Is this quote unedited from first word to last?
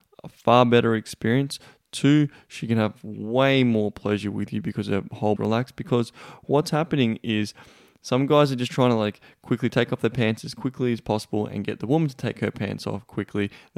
no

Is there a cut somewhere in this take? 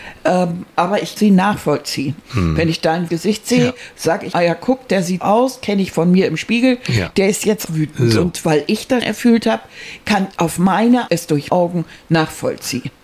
yes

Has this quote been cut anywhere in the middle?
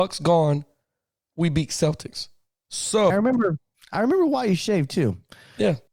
yes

